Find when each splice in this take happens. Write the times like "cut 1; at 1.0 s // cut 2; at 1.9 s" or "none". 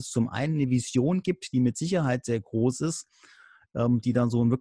none